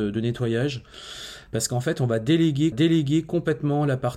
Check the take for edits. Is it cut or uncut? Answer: cut